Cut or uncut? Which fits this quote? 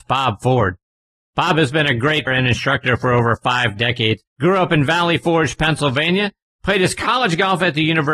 cut